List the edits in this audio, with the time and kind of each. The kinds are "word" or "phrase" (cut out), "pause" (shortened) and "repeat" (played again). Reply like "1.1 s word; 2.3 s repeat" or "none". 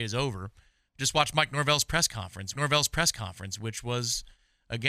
2.5 s repeat